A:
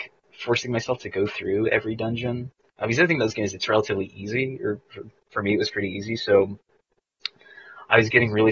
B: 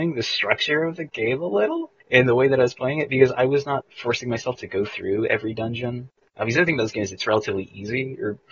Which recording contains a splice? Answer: B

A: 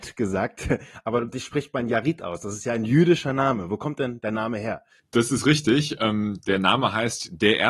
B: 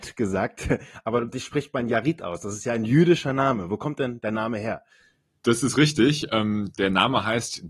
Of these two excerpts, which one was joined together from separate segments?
A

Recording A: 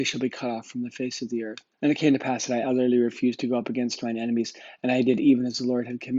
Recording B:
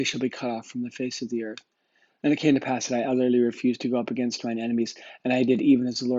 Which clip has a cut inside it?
A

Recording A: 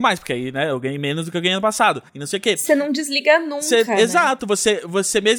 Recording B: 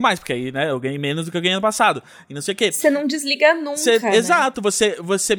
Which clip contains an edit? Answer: A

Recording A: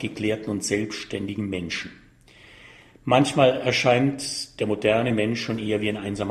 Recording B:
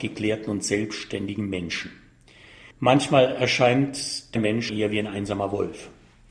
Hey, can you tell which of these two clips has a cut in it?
B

